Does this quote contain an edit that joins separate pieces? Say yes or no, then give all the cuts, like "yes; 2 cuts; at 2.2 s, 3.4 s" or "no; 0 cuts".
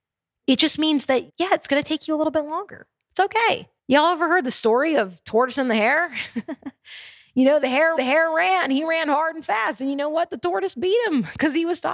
yes; 3 cuts; at 1.3 s, 3.8 s, 8.0 s